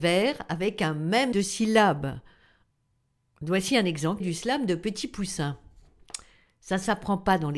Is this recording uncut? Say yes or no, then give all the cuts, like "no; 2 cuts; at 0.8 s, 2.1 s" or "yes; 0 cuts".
no; 2 cuts; at 1.3 s, 4.2 s